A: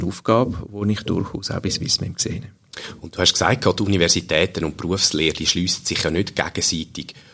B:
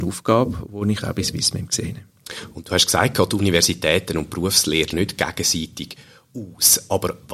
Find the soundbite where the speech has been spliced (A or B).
B